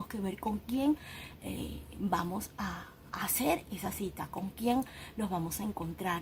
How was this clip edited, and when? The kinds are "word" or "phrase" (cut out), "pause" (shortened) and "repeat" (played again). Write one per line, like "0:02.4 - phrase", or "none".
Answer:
none

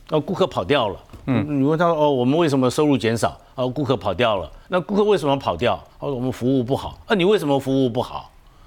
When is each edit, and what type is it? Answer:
0:05.9 - pause

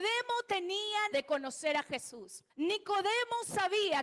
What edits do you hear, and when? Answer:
0:01.1 - word
0:02.5 - pause

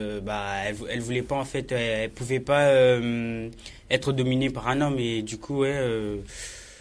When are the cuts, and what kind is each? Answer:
none

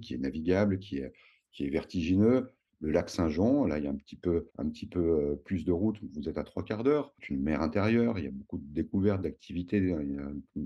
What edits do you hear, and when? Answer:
0:04.5 - pause

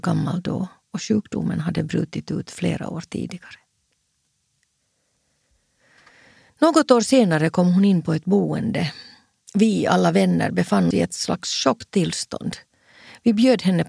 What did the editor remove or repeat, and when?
0:10.9 - word

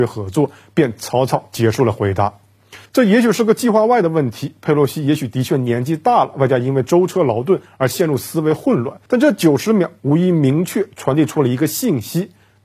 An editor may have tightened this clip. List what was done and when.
0:02.9 - pause
0:09.1 - pause

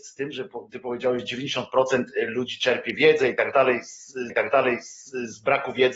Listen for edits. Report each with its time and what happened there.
0:04.3 - repeat

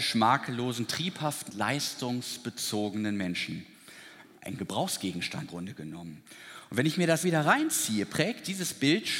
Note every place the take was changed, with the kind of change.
0:01.5 - word
0:05.5 - word
0:07.2 - word

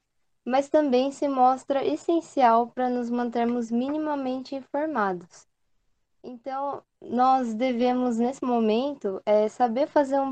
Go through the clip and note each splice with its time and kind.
none

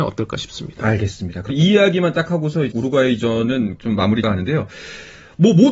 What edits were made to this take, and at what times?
0:01.5 - word
0:02.7 - word
0:03.8 - word
0:04.2 - word

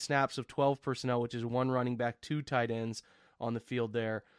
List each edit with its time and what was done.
none

